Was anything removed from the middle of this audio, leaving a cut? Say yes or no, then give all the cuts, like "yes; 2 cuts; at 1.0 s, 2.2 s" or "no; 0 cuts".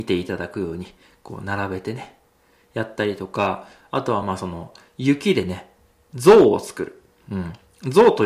no; 0 cuts